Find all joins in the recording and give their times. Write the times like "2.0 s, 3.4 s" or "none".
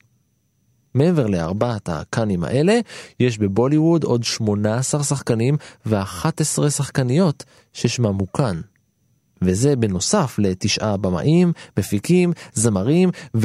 none